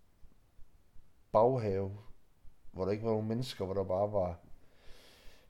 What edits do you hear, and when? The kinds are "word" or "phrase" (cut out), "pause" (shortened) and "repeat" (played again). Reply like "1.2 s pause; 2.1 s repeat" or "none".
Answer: 2.6 s pause